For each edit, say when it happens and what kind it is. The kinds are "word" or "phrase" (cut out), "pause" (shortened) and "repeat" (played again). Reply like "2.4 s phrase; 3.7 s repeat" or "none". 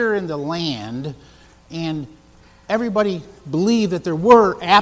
none